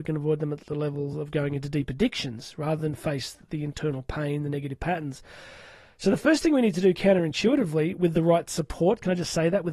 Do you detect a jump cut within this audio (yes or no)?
no